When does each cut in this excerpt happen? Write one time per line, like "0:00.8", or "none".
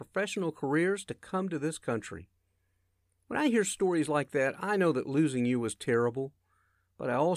none